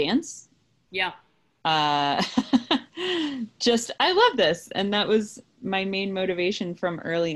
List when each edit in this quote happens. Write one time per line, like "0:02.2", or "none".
none